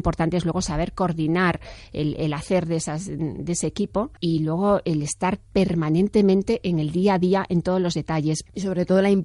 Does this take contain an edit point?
yes; 1 cut; at 4.2 s

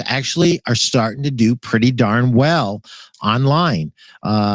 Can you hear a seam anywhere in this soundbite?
no; 0 cuts

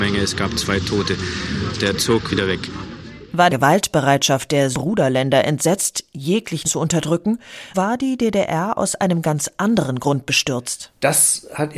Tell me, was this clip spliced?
yes; 6 cuts; at 1.9 s, 2.3 s, 3.5 s, 4.7 s, 6.6 s, 7.7 s

